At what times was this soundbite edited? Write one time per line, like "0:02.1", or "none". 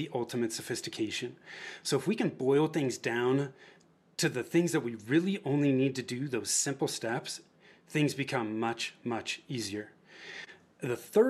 none